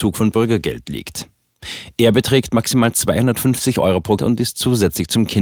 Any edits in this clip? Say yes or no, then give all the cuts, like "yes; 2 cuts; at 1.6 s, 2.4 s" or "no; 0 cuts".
yes; 1 cut; at 4.2 s